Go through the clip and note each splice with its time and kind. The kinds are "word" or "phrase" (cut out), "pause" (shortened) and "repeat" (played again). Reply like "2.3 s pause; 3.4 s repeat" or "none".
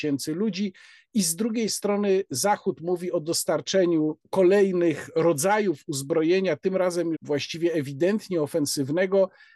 4.2 s pause; 7.1 s word